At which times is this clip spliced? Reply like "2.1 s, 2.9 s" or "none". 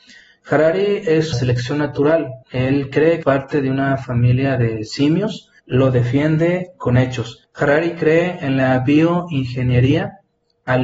1.3 s, 2.4 s, 3.2 s, 5.6 s